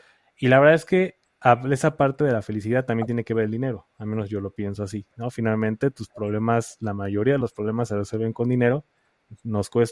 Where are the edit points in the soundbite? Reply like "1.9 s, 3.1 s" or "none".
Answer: none